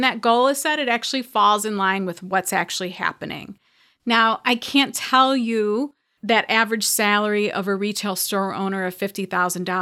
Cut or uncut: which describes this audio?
cut